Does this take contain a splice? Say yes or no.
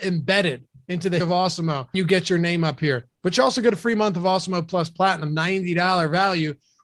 yes